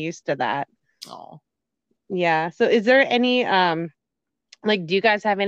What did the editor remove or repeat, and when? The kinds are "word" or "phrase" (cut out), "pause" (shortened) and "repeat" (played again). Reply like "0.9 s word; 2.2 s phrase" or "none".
none